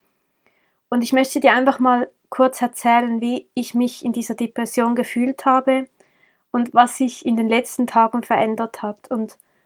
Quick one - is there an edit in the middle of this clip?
no; 0 cuts

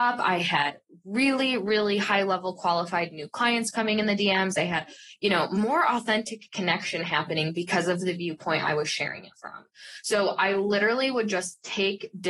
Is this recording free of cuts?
yes; 0 cuts

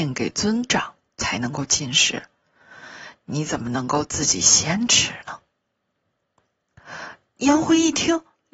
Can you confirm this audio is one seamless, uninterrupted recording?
yes; 0 cuts

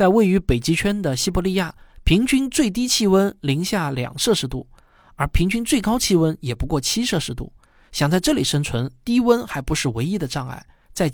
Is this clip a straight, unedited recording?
yes; 0 cuts

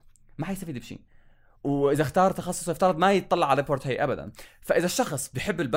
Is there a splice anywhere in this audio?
no; 0 cuts

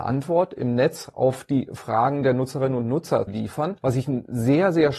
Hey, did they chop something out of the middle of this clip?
yes; 1 cut; at 3.3 s

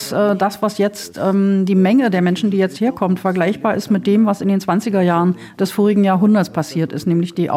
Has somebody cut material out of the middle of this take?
no; 0 cuts

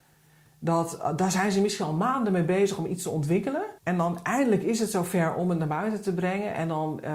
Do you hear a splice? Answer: yes; 1 cut; at 3.8 s

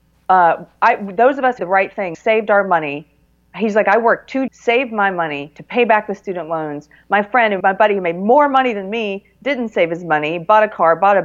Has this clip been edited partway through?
yes; 4 cuts; at 1.6 s, 2.1 s, 4.5 s, 7.6 s

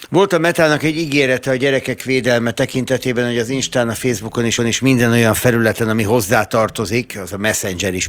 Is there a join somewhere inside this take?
yes; 1 cut; at 4.6 s

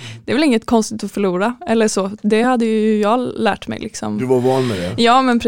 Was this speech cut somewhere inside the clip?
no; 0 cuts

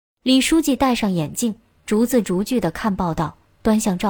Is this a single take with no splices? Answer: yes; 0 cuts

